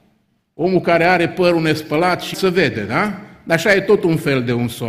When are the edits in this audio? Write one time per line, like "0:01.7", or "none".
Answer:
0:02.3